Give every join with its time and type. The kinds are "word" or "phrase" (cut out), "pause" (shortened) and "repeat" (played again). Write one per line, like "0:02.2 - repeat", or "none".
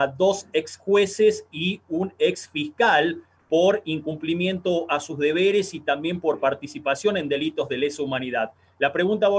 none